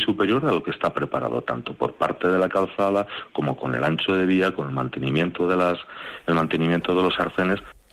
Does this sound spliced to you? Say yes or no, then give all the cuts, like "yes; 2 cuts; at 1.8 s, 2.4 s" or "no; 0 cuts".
no; 0 cuts